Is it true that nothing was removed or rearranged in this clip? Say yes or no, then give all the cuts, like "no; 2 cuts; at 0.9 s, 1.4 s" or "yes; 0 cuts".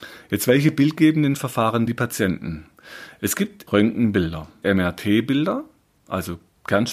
no; 3 cuts; at 1.9 s, 3.7 s, 4.6 s